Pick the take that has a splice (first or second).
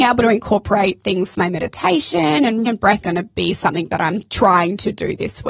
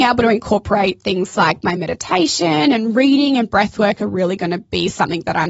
first